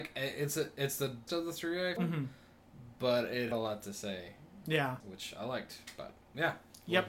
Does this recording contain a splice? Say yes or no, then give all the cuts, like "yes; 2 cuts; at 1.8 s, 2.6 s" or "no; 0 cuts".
yes; 4 cuts; at 1.3 s, 2.0 s, 3.5 s, 5.0 s